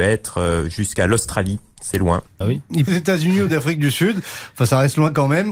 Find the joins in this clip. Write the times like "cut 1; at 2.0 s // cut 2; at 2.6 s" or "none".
cut 1; at 2.4 s // cut 2; at 2.9 s